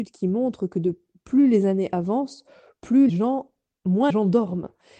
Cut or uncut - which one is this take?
cut